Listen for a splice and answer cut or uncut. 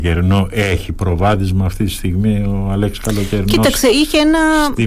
uncut